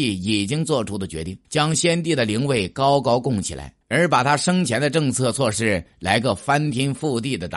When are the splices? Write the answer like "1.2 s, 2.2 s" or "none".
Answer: 1.4 s, 3.8 s